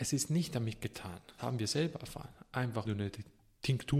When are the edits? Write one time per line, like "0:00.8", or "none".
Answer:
0:01.4
0:02.8